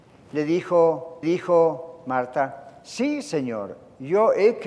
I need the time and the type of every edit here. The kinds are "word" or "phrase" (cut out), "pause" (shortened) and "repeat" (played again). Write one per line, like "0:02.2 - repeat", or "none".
0:01.2 - repeat

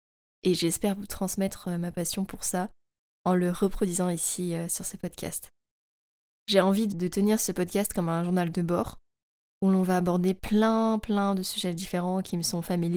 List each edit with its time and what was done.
0:06.9 - word

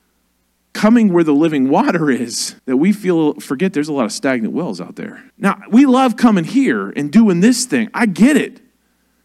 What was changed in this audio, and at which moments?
0:02.6 - pause
0:05.3 - pause

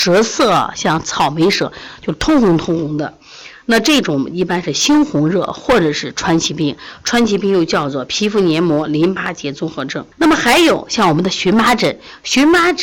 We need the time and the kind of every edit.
0:10.1 - pause

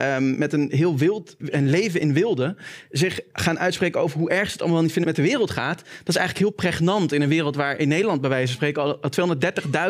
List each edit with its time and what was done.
0:01.4 - word
0:05.0 - phrase

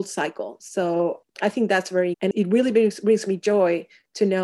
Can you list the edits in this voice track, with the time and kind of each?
0:02.1 - word

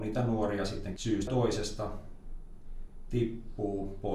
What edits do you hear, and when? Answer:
0:01.0 - word
0:01.3 - word

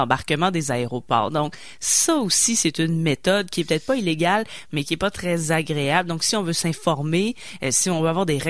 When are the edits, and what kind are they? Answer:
none

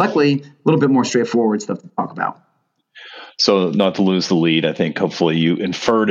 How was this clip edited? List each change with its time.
none

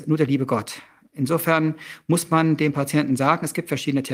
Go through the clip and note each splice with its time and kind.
none

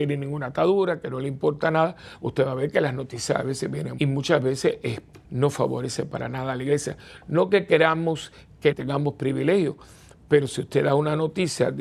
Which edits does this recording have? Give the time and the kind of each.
0:04.0 - phrase
0:05.2 - pause
0:08.7 - phrase

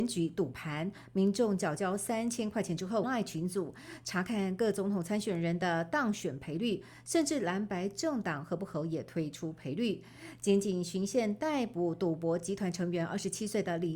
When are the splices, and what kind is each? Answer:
0:03.0 - phrase

